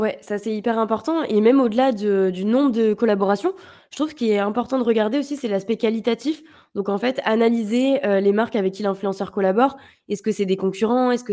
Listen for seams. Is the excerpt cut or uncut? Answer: uncut